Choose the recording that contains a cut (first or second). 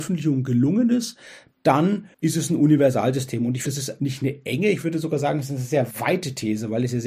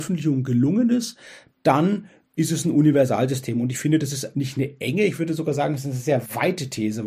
first